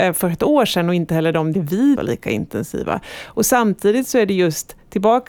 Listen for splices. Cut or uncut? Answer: cut